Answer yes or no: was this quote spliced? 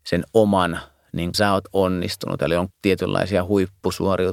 yes